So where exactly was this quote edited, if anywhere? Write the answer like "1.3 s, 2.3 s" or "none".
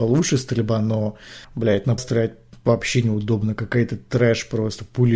1.4 s, 2.0 s